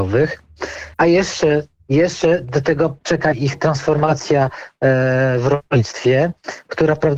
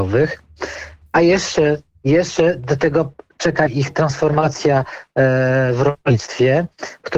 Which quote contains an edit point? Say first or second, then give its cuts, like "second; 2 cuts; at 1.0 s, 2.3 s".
first; 2 cuts; at 0.9 s, 3.0 s